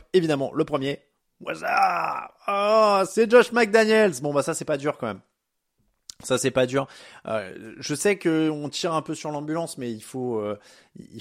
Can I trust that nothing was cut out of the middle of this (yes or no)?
yes